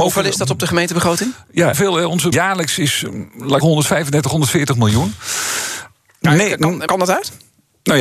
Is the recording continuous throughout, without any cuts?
no; 4 cuts; at 1.7 s, 2.3 s, 3.6 s, 6.9 s

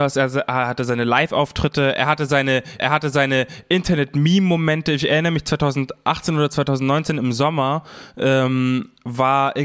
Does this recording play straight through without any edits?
no; 1 cut; at 2.8 s

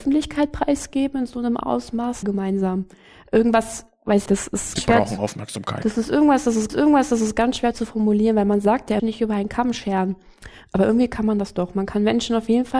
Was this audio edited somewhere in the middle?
yes; 5 cuts; at 2.2 s, 4.3 s, 4.8 s, 6.7 s, 9.0 s

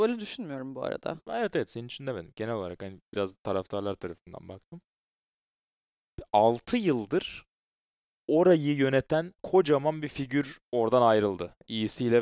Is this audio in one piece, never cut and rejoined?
no; 2 cuts; at 9.4 s, 10.7 s

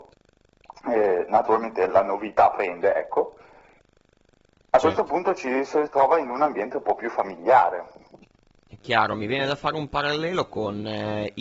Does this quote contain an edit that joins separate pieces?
no; 0 cuts

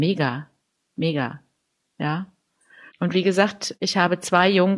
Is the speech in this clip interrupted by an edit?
no; 0 cuts

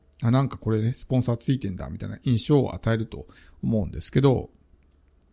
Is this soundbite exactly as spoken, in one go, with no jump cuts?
yes; 0 cuts

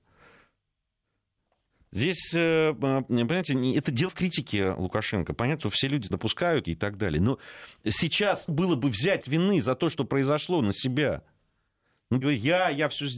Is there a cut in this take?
yes; 7 cuts; at 4.1 s, 5.6 s, 6.1 s, 6.6 s, 8.5 s, 9.2 s, 12.2 s

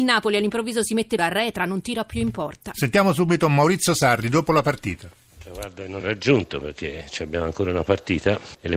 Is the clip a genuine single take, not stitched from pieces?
no; 2 cuts; at 1.2 s, 6.0 s

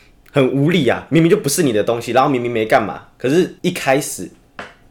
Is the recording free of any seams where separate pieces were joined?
no; 1 cut; at 3.6 s

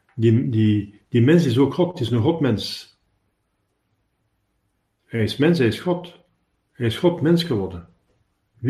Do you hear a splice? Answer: no; 0 cuts

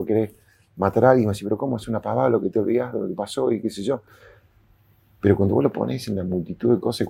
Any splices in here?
no; 0 cuts

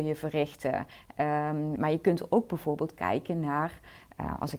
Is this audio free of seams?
no; 1 cut; at 1.8 s

